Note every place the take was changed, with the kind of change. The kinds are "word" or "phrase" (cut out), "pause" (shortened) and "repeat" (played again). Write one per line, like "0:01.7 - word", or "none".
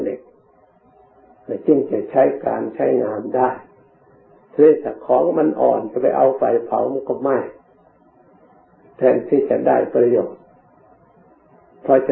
none